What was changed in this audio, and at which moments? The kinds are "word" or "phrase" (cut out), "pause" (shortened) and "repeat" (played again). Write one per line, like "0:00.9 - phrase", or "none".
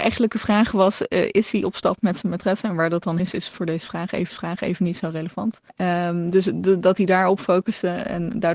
0:03.2 - word
0:04.3 - repeat
0:05.7 - pause